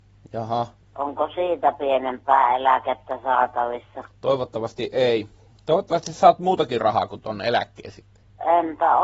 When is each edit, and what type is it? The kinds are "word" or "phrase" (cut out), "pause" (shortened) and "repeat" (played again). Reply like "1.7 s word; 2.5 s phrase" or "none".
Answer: none